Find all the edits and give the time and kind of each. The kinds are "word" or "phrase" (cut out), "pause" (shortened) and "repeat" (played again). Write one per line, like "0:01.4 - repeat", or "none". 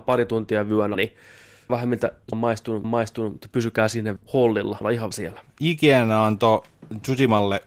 0:00.9 - word
0:01.7 - word
0:02.3 - word
0:02.8 - repeat
0:04.2 - word
0:04.8 - word
0:05.1 - word